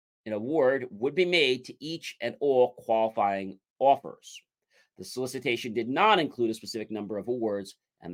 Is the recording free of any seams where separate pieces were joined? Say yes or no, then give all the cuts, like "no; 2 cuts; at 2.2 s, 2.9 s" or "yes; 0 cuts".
yes; 0 cuts